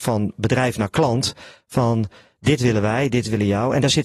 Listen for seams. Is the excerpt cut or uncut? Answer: uncut